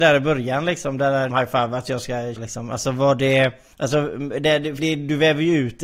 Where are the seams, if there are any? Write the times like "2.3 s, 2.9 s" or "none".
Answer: 1.3 s, 2.4 s, 3.7 s, 4.8 s